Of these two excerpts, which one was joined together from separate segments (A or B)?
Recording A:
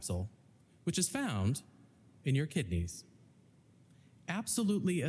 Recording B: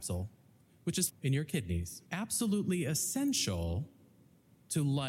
B